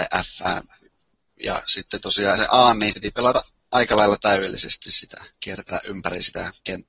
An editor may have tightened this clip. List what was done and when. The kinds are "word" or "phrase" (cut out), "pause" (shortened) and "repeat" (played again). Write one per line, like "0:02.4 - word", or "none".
0:02.4 - phrase
0:02.9 - word
0:05.3 - pause